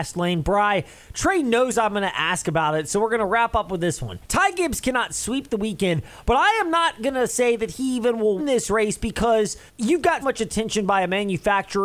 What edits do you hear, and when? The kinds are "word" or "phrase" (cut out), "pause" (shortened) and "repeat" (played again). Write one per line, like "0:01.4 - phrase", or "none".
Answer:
0:04.2 - pause
0:08.4 - word
0:09.7 - pause
0:10.2 - word